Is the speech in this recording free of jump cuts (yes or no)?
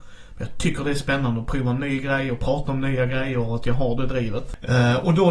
yes